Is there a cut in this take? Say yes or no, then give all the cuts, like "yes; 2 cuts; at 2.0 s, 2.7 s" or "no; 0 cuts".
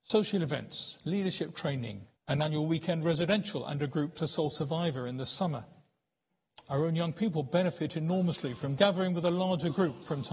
yes; 2 cuts; at 2.2 s, 4.1 s